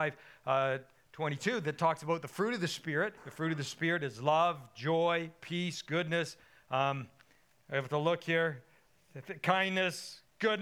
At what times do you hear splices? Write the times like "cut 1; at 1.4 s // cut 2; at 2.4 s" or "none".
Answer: cut 1; at 3.2 s